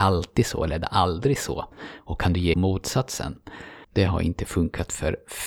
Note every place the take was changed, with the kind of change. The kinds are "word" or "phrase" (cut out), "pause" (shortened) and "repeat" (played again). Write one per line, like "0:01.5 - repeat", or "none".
0:02.5 - phrase
0:03.8 - pause